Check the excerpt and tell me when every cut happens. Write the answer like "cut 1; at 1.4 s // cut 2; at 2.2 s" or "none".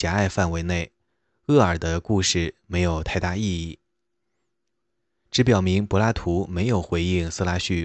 none